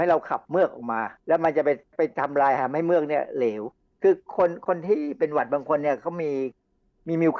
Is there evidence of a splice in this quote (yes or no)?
yes